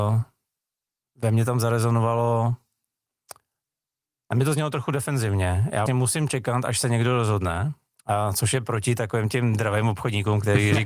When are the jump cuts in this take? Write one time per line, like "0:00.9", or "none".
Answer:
0:05.9